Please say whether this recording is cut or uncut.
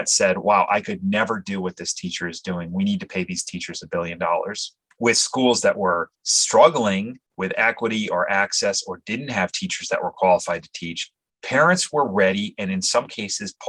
uncut